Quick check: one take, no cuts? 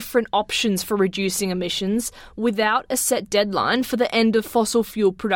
yes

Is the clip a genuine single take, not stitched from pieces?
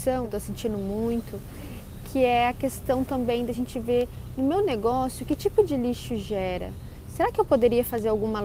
yes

